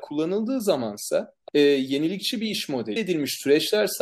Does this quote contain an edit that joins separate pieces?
yes; 2 cuts; at 1.4 s, 3.0 s

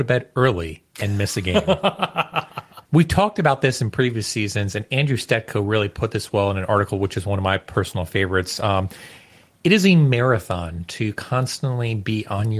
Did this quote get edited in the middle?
yes; 1 cut; at 2.8 s

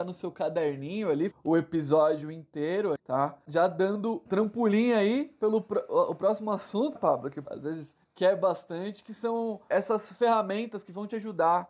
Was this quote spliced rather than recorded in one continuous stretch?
yes; 6 cuts; at 1.3 s, 3.0 s, 4.3 s, 7.0 s, 7.4 s, 9.7 s

